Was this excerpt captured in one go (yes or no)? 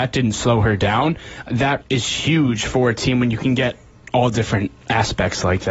no